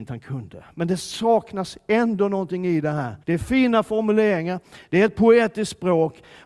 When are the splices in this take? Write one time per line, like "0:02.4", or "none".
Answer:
0:03.2